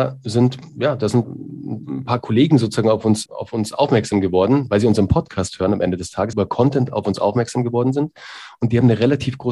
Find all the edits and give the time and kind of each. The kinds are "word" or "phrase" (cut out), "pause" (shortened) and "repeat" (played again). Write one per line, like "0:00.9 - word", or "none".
0:01.2 - word
0:03.3 - word
0:06.3 - word